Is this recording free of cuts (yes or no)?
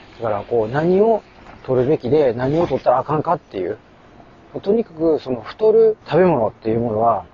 no